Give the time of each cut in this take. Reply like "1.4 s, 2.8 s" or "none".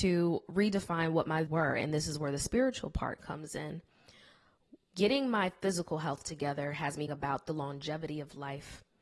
1.5 s, 4.8 s, 7.1 s

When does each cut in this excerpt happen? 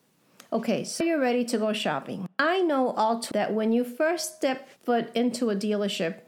1.0 s, 3.3 s, 4.8 s

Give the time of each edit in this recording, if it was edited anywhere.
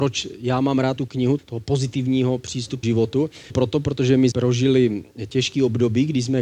1.0 s, 1.4 s, 2.8 s, 3.5 s, 4.3 s, 5.3 s

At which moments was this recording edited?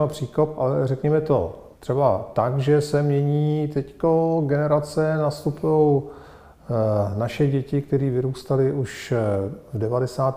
1.7 s

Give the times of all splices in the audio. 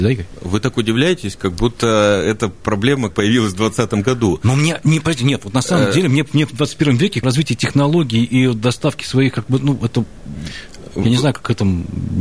3.1 s, 7.2 s

